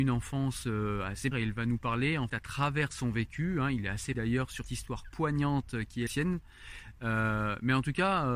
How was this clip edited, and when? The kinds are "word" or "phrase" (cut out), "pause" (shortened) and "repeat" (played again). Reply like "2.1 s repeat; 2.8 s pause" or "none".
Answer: 1.3 s word; 2.3 s word; 4.1 s word; 4.6 s word; 6.1 s word